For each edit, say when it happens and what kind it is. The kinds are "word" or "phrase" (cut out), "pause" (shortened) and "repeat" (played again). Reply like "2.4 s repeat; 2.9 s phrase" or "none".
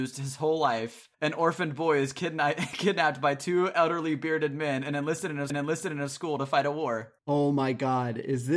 1.1 s pause; 5.5 s repeat; 7.2 s pause